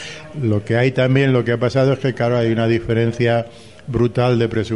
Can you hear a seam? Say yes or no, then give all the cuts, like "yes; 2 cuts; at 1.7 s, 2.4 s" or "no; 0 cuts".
no; 0 cuts